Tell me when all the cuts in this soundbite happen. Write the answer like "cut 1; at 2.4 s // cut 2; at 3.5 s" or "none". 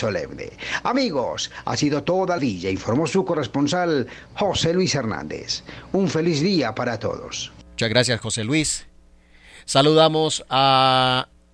cut 1; at 2.4 s // cut 2; at 7.7 s